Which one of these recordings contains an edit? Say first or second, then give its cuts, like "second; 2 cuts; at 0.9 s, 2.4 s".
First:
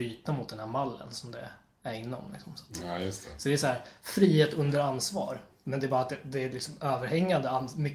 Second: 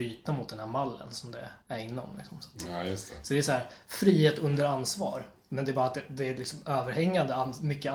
second; 1 cut; at 1.6 s